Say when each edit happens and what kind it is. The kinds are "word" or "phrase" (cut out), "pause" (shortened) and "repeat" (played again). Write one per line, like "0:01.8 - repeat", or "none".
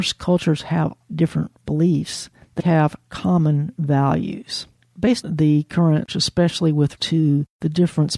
0:01.1 - word
0:02.6 - word
0:05.2 - word
0:06.1 - word
0:07.0 - word